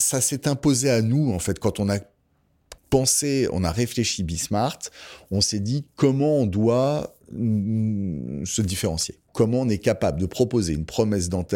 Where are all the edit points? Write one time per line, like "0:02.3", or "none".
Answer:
0:02.8
0:09.3